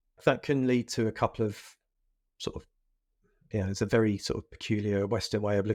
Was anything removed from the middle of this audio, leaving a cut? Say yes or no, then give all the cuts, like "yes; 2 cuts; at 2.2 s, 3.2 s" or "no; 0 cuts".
no; 0 cuts